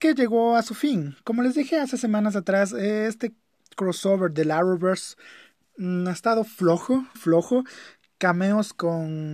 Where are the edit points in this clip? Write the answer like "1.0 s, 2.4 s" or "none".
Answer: 7.2 s